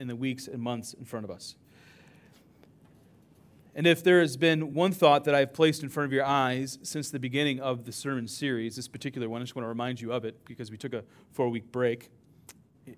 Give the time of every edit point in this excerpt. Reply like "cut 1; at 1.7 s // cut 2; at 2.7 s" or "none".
none